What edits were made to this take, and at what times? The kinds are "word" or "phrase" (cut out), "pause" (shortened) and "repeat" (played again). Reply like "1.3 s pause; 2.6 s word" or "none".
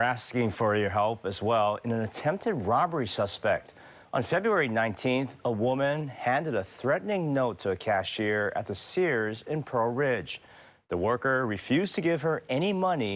none